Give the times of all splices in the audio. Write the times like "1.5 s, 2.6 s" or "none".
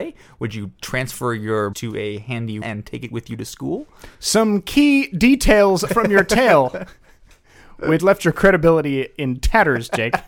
1.7 s, 2.6 s, 4.1 s, 5.9 s, 8.0 s